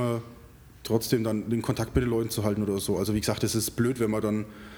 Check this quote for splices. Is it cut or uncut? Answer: uncut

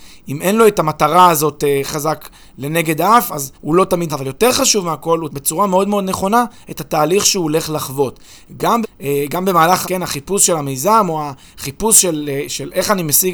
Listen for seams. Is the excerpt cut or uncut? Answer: cut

